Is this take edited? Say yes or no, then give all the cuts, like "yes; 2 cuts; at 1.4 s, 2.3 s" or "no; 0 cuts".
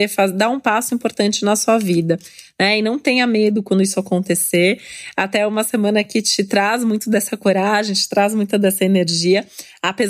no; 0 cuts